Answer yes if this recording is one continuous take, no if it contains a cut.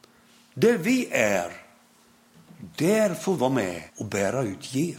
no